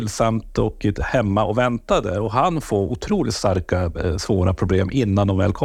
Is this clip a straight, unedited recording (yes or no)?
no